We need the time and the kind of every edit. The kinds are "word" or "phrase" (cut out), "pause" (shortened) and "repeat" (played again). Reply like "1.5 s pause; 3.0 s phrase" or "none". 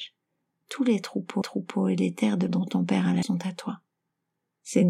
1.4 s repeat; 2.5 s word; 3.2 s word